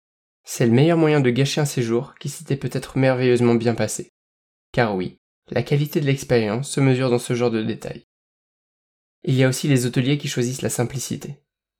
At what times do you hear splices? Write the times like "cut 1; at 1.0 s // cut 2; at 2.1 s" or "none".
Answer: none